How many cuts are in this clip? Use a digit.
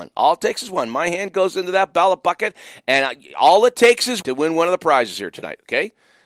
1